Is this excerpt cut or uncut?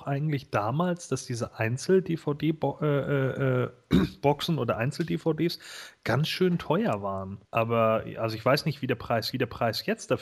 cut